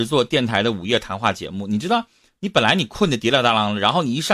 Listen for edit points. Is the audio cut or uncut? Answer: uncut